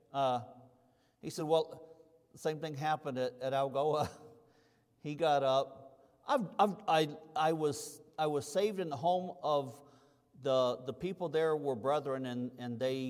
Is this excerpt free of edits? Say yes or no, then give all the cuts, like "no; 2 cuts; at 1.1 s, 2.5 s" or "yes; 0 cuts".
yes; 0 cuts